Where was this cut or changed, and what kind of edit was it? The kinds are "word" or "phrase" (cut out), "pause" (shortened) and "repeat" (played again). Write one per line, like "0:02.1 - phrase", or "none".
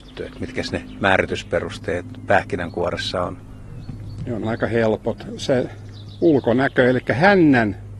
0:04.4 - word